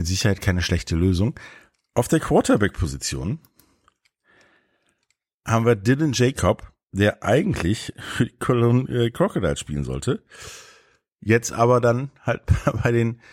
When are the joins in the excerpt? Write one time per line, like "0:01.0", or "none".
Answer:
none